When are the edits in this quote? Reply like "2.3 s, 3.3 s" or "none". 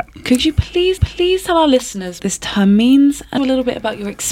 1.0 s, 2.2 s, 3.4 s